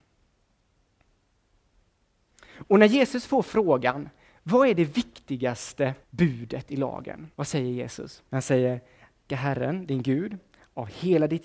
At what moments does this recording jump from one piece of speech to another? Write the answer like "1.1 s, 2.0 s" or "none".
6.0 s, 7.3 s, 8.3 s, 9.3 s